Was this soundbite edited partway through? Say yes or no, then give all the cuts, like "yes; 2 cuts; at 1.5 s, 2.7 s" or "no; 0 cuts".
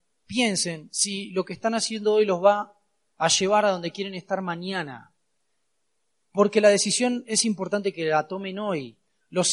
no; 0 cuts